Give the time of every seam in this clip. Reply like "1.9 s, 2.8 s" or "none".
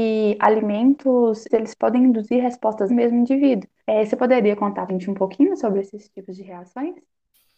1.5 s, 2.9 s, 3.8 s, 4.9 s

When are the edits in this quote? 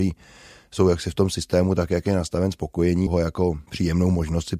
3.1 s

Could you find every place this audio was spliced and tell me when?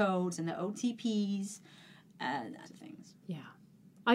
2.6 s

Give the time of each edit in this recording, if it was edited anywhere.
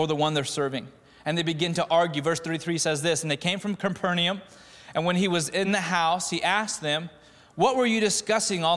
none

